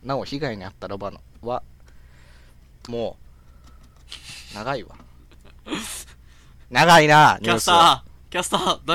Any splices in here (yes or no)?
yes